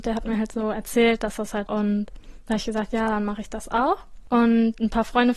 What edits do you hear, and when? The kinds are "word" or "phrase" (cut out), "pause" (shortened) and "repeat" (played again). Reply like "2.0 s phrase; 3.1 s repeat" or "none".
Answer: 1.7 s phrase